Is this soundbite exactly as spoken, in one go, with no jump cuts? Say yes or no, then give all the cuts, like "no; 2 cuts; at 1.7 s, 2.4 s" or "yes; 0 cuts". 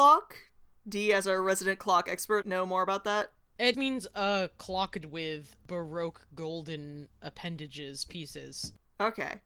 no; 3 cuts; at 2.4 s, 3.7 s, 5.0 s